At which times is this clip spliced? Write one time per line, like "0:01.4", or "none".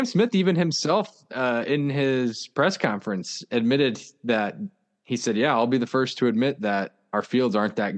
none